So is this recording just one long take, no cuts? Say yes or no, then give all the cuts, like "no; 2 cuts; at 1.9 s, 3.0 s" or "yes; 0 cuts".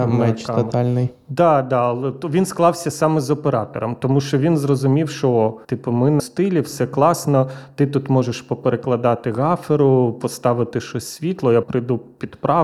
no; 3 cuts; at 5.6 s, 6.2 s, 11.6 s